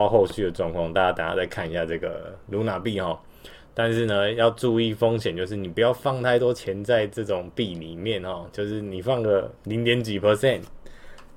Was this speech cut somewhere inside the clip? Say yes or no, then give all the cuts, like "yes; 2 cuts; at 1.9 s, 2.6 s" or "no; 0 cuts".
yes; 1 cut; at 9.6 s